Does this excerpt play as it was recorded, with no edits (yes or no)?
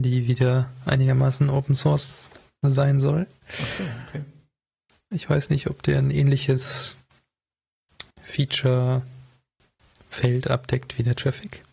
no